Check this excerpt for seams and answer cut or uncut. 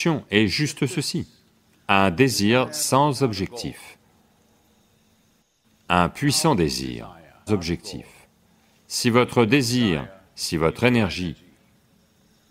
cut